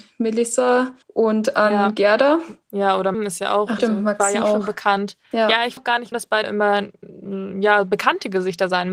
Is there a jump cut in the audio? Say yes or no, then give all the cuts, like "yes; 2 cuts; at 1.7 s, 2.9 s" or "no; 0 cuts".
yes; 9 cuts; at 1.0 s, 2.6 s, 3.1 s, 3.8 s, 4.4 s, 5.2 s, 5.8 s, 6.1 s, 6.4 s